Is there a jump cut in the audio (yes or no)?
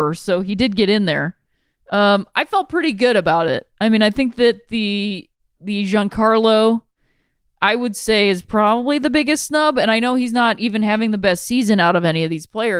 no